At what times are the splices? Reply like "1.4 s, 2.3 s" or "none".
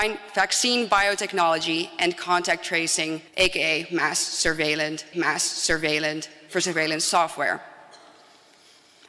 3.3 s, 5.1 s